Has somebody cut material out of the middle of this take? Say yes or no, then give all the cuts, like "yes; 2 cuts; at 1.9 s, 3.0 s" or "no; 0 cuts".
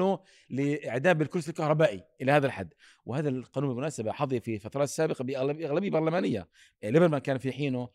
no; 0 cuts